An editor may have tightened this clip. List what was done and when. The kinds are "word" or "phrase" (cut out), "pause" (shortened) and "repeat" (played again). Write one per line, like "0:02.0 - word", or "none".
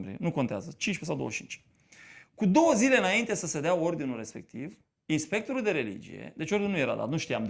none